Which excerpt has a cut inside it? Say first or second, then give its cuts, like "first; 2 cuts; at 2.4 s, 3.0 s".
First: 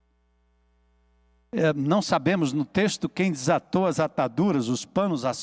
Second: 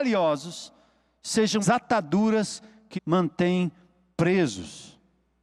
second; 2 cuts; at 1.6 s, 3.0 s